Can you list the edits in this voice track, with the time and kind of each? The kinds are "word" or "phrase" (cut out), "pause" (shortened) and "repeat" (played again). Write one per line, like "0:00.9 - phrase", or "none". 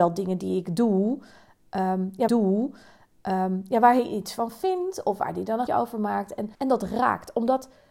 0:02.3 - repeat
0:05.7 - word
0:06.5 - pause